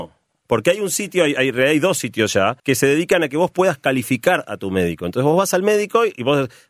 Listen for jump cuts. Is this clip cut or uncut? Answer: cut